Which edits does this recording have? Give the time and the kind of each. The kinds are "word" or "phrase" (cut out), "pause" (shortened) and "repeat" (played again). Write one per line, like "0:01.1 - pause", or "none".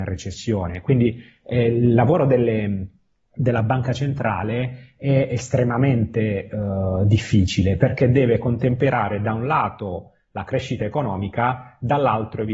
none